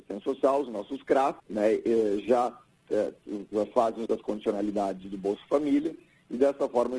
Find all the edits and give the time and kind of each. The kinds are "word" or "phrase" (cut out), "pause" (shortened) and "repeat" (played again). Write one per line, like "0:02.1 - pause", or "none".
0:01.4 - pause
0:04.1 - word

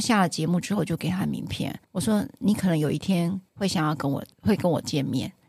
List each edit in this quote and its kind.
0:01.8 - pause
0:03.5 - pause

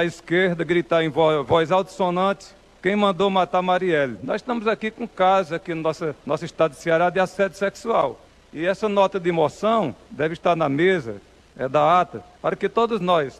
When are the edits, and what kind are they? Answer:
0:06.2 - pause

